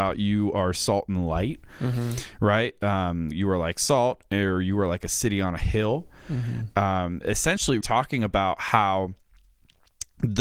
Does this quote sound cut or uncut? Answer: cut